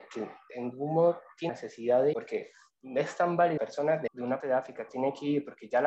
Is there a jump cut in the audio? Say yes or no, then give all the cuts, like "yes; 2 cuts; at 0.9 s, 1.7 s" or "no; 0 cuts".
yes; 6 cuts; at 1.5 s, 2.1 s, 3.6 s, 4.1 s, 4.4 s, 4.9 s